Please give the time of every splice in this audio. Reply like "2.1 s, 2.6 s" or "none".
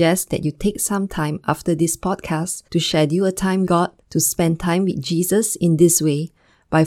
2.7 s, 3.7 s, 4.0 s

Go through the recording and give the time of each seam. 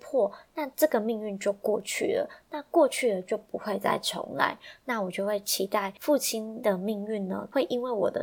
none

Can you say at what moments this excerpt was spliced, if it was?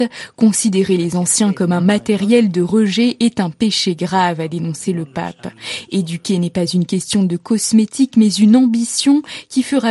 none

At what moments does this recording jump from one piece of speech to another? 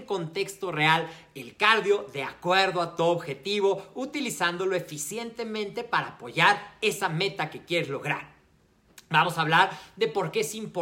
none

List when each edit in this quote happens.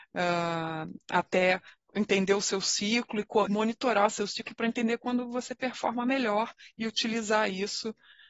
3.5 s

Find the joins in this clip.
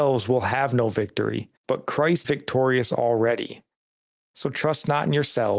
1.6 s, 2.2 s

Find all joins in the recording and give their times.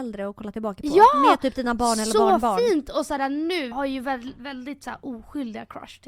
3.7 s

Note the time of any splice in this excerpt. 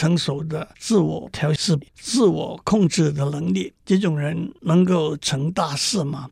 1.9 s, 3.8 s

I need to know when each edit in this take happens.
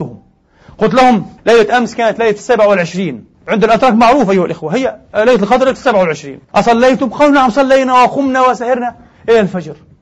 1.4 s, 3.3 s, 6.4 s

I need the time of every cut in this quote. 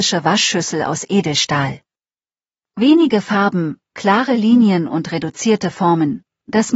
none

